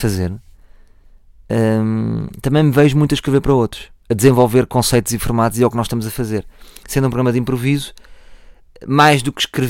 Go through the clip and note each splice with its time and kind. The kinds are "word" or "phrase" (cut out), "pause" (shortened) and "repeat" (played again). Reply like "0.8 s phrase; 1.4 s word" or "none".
none